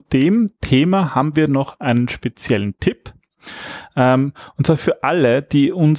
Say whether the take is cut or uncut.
uncut